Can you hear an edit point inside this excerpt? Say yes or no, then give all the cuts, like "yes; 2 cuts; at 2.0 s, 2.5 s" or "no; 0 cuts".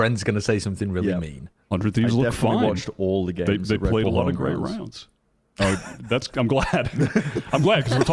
no; 0 cuts